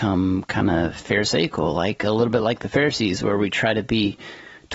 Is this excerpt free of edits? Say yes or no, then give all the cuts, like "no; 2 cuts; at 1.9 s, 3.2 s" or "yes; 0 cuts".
yes; 0 cuts